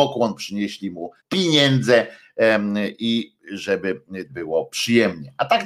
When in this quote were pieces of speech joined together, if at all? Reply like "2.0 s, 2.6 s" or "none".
1.2 s, 4.3 s